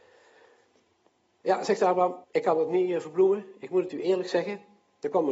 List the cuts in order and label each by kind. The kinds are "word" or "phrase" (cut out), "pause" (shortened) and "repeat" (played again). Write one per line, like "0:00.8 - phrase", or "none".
0:02.2 - pause